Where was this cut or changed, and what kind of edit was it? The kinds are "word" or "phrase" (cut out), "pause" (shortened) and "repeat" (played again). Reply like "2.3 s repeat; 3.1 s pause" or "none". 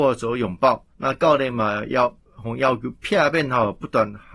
0.9 s pause